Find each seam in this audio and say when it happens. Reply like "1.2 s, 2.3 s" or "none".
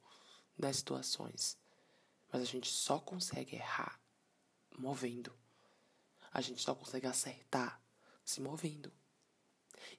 none

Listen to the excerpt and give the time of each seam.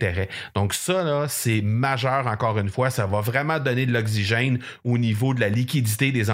none

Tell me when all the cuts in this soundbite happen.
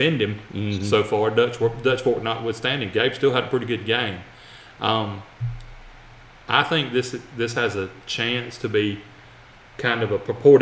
none

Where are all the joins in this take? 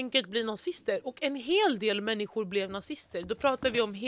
none

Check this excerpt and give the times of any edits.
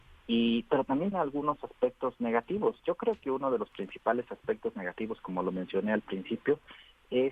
1.1 s, 2.8 s

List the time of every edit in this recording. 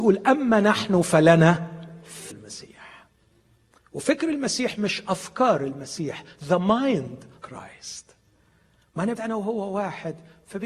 2.3 s, 7.4 s, 9.1 s

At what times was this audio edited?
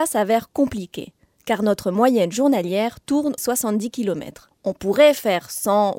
3.4 s

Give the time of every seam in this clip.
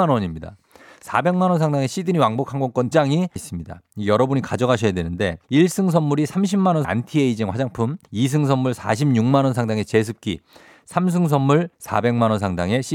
2.9 s, 3.4 s, 5.4 s, 6.8 s, 8.0 s, 11.7 s

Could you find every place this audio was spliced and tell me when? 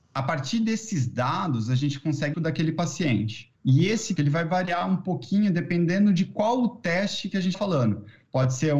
2.3 s, 3.5 s, 4.2 s, 7.5 s

